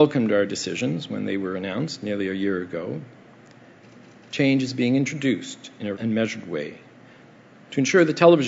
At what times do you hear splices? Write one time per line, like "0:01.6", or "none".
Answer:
0:05.9